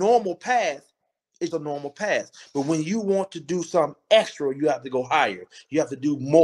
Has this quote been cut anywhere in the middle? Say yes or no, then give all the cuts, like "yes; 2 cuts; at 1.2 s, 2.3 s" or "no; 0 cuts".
yes; 1 cut; at 1.5 s